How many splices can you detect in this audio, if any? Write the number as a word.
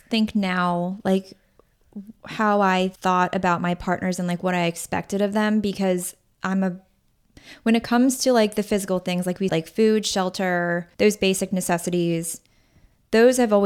three